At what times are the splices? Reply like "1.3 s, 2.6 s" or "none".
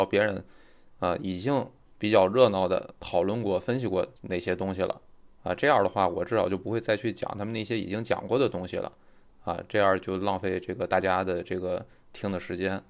4.2 s